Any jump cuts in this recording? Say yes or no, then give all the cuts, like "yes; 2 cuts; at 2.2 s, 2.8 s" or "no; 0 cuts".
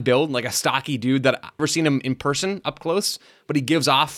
yes; 1 cut; at 1.6 s